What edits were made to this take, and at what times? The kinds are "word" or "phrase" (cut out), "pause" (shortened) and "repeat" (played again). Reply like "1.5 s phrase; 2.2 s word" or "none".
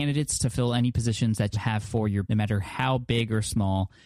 1.5 s word; 2.2 s word